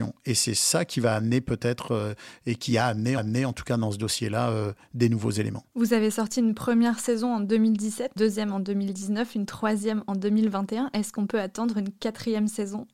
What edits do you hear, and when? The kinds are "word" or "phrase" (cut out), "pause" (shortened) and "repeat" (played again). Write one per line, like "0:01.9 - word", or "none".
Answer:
0:03.2 - repeat
0:05.7 - pause
0:08.2 - word